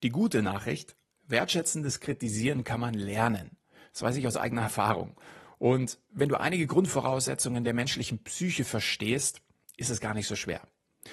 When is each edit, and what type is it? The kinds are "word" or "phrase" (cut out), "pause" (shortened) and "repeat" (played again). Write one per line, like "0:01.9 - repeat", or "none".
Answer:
none